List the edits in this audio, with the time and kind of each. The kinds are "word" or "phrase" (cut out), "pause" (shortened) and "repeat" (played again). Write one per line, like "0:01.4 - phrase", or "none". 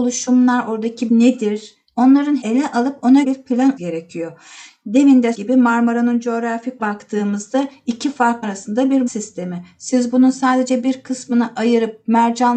0:01.1 - word
0:02.4 - word
0:03.2 - word
0:03.8 - word
0:05.3 - word
0:06.8 - word
0:08.4 - word
0:09.1 - word